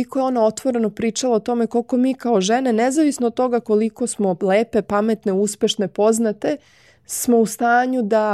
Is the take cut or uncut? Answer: uncut